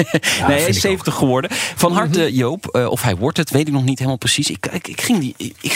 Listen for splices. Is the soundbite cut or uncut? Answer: uncut